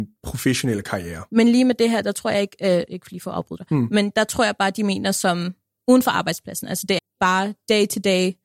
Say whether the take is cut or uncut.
cut